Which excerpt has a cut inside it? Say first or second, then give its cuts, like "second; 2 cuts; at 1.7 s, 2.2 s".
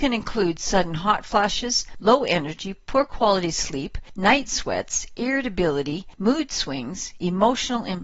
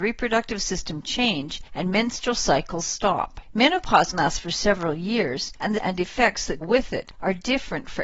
second; 3 cuts; at 4.1 s, 5.7 s, 6.6 s